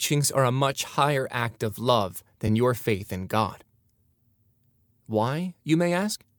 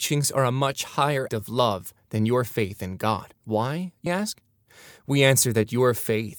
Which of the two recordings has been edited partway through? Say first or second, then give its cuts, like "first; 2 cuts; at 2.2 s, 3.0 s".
second; 3 cuts; at 1.3 s, 3.4 s, 4.1 s